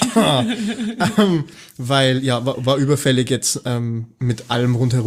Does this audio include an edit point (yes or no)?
no